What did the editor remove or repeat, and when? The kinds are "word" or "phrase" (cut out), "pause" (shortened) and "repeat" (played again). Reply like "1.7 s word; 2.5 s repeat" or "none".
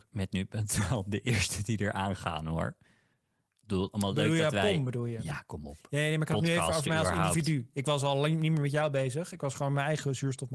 none